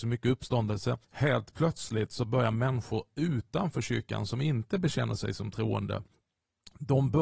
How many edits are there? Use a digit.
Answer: 1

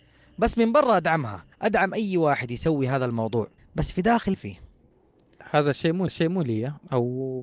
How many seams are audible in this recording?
4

